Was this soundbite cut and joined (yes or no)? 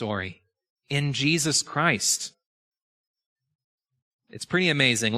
no